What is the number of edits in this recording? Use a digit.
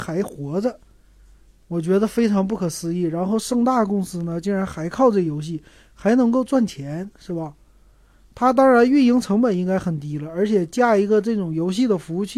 0